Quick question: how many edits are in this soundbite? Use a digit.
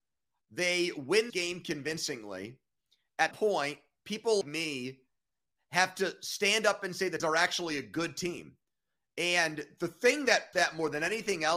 5